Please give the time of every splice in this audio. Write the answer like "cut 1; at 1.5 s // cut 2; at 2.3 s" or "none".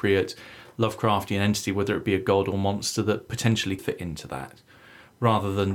cut 1; at 3.8 s